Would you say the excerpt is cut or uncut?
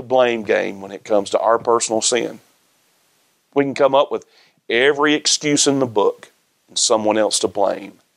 uncut